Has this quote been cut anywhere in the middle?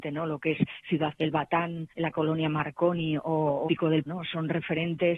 yes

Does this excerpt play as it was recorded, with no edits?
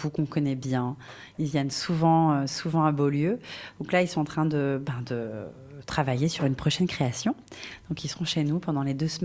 yes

